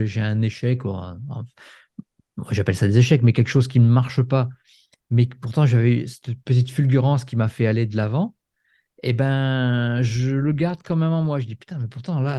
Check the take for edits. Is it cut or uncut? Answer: uncut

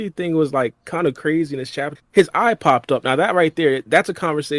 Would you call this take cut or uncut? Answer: cut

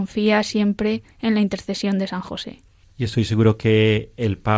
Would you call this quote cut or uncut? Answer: cut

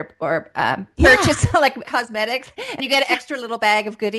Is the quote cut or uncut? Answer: cut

